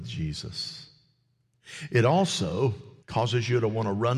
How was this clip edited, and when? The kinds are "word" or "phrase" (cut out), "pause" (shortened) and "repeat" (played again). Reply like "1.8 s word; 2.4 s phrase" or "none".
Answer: 3.0 s pause